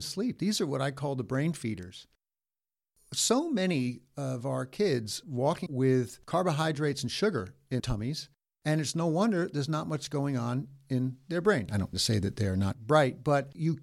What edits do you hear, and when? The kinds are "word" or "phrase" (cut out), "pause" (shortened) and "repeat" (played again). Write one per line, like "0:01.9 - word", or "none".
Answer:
0:05.2 - word
0:05.7 - word
0:07.8 - word
0:11.9 - word